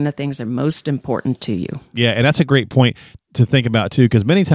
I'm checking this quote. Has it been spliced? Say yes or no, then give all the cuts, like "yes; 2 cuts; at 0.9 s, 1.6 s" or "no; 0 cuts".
no; 0 cuts